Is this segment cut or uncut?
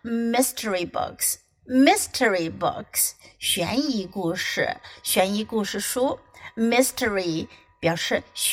uncut